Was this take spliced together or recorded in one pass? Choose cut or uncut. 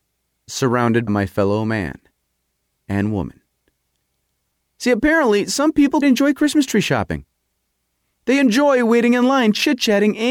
cut